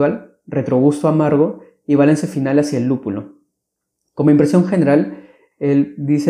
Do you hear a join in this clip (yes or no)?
no